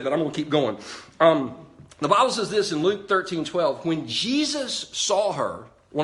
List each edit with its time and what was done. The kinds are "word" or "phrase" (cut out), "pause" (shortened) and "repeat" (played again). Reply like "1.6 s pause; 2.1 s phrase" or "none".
none

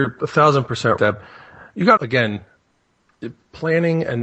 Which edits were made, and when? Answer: 1.0 s word; 2.0 s phrase

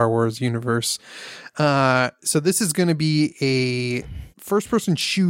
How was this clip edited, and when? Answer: 4.3 s pause

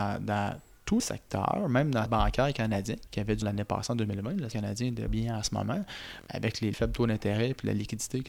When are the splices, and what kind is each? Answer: 1.0 s word; 2.1 s word; 3.1 s word; 3.4 s word; 4.5 s word; 5.1 s word; 6.3 s word; 6.7 s word

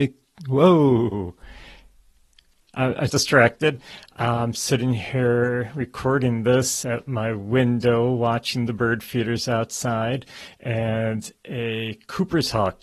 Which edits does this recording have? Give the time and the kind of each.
3.1 s phrase

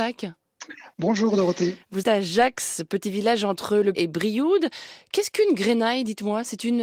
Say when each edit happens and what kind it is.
2.0 s word; 3.9 s word

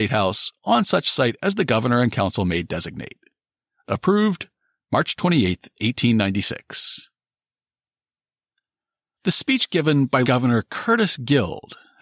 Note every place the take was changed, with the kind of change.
10.2 s word

